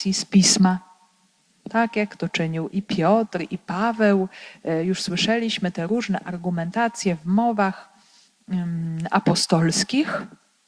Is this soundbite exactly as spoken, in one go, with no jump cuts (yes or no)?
no